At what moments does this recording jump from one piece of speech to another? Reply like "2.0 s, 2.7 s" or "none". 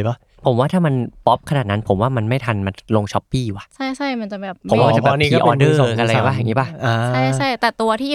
3.7 s